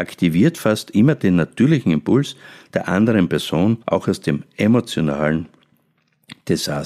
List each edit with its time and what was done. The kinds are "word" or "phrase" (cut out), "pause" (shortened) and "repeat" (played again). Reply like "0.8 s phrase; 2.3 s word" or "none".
3.8 s pause